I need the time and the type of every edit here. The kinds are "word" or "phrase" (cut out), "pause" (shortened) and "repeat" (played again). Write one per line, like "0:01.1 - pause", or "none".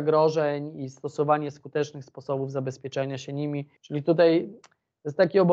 0:03.8 - pause